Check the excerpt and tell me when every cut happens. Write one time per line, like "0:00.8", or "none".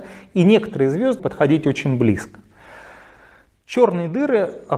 0:01.2

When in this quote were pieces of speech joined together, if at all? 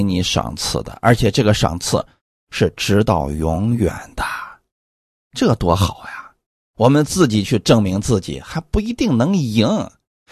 none

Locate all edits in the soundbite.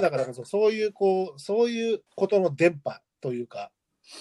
0:02.1

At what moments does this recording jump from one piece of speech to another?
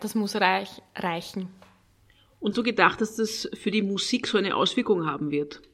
0:02.5

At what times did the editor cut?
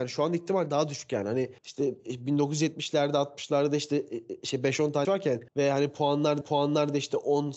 0:01.6
0:05.0
0:05.5
0:06.4

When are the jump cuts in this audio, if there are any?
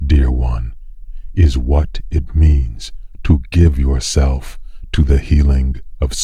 none

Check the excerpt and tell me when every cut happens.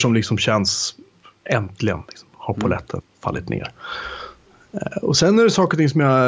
none

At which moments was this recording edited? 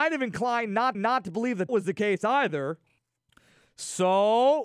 0:00.9
0:01.7
0:03.0

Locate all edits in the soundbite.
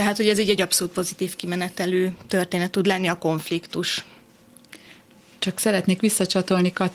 none

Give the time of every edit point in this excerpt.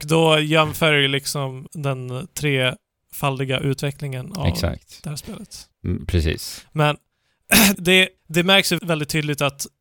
0:01.7
0:05.7
0:07.7
0:08.2
0:08.8

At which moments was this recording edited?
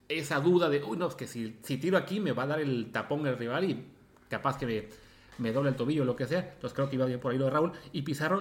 none

